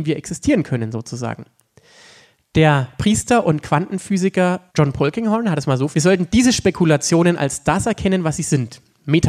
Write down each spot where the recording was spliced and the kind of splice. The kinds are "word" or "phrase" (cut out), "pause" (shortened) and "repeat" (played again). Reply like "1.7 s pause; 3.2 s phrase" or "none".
4.7 s pause; 5.9 s word